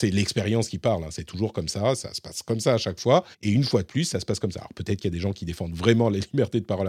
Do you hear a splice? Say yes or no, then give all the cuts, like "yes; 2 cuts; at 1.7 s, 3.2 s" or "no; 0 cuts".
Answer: yes; 1 cut; at 3.3 s